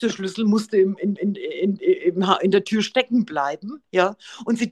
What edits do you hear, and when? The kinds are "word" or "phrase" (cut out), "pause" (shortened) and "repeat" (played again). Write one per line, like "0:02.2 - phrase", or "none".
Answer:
0:01.2 - repeat